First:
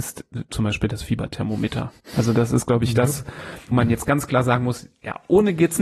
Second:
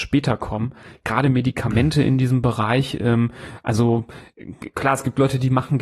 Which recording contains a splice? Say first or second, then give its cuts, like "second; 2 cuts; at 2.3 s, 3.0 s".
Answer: first; 1 cut; at 3.7 s